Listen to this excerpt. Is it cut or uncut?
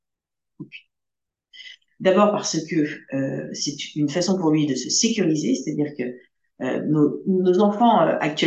uncut